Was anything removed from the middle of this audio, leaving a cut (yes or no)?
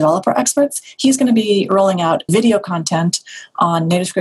yes